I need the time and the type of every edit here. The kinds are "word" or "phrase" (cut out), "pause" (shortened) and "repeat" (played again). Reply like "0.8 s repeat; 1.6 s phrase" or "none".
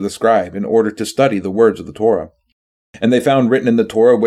none